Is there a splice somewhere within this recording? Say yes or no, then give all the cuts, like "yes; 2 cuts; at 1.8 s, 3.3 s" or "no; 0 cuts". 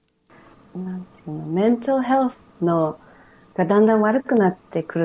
no; 0 cuts